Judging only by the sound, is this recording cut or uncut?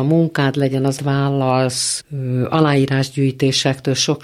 cut